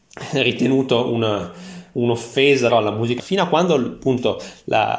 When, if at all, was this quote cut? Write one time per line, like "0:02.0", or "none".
0:02.7
0:03.2